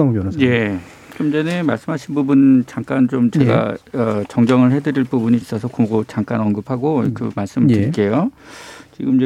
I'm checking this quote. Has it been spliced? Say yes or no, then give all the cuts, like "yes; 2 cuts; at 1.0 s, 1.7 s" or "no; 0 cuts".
yes; 1 cut; at 5.4 s